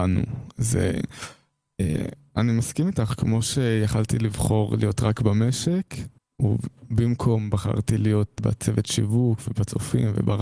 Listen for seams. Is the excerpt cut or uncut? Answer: cut